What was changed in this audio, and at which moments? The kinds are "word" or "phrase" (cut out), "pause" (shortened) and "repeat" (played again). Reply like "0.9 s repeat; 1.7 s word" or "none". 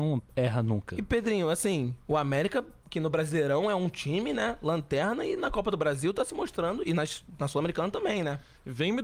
none